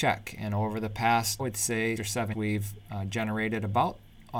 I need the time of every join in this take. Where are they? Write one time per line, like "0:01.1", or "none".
0:01.4
0:02.0
0:02.3